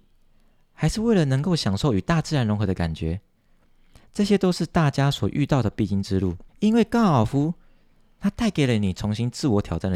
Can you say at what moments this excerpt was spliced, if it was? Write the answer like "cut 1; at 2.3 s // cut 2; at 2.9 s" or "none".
cut 1; at 6.5 s